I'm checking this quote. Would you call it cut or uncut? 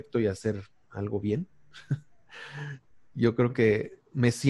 uncut